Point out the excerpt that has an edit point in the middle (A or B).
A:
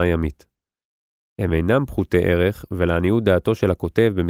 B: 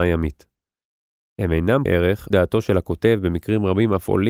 B